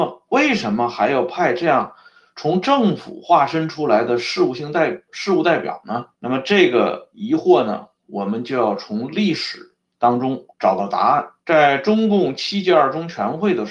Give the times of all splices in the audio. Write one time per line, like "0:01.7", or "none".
0:06.1
0:10.5
0:11.4